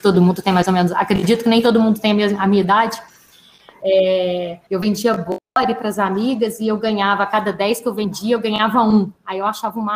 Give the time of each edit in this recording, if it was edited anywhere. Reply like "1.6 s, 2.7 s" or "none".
4.7 s